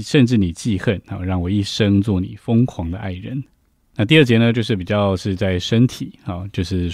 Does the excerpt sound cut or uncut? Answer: uncut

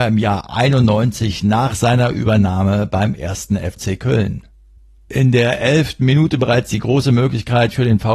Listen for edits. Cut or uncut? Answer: uncut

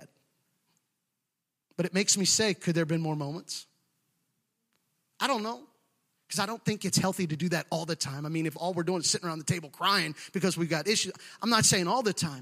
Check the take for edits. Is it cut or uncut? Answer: uncut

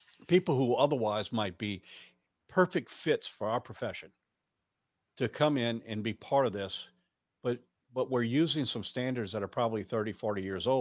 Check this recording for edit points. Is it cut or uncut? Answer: uncut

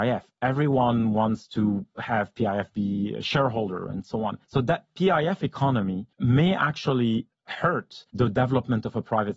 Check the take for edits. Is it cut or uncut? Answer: cut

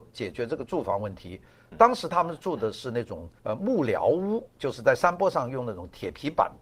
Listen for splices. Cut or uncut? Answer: cut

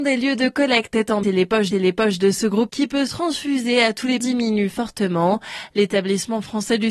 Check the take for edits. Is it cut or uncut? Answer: cut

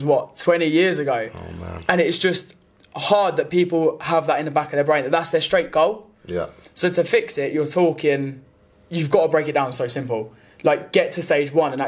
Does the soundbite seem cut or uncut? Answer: uncut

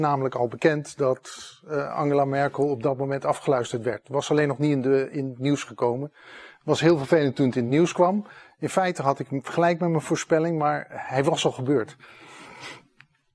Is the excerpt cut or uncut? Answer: uncut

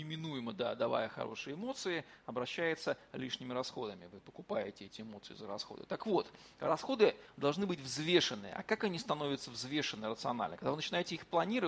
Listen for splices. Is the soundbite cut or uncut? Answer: uncut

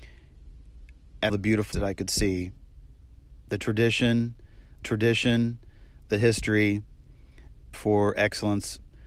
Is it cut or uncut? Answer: cut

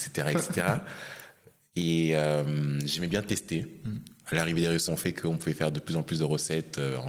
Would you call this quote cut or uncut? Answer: cut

